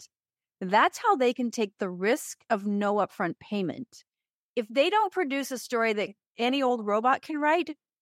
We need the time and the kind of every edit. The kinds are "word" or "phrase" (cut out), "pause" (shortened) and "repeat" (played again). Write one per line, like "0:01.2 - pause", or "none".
none